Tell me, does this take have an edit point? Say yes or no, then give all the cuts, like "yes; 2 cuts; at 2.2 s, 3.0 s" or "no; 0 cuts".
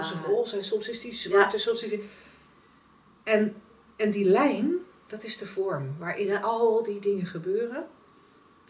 no; 0 cuts